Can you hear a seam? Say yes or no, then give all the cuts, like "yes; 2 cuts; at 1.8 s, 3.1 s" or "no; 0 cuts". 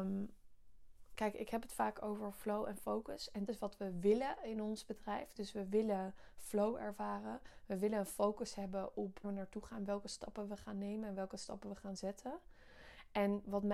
yes; 2 cuts; at 3.5 s, 9.2 s